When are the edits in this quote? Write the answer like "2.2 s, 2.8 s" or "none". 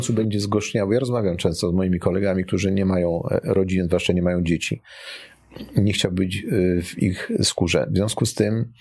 none